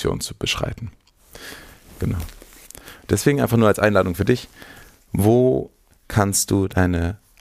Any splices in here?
no; 0 cuts

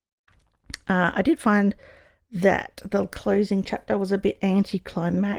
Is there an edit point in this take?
no; 0 cuts

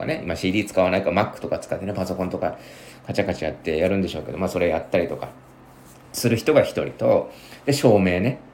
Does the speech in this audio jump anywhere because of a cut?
no; 0 cuts

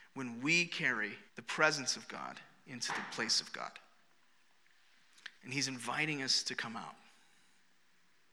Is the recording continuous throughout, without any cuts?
no; 2 cuts; at 1.3 s, 5.4 s

